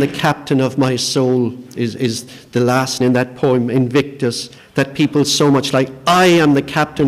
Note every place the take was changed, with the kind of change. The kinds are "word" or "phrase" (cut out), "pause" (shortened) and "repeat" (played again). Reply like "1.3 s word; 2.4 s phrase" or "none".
3.0 s word; 4.6 s pause